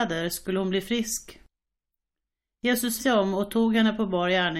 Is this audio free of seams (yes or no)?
no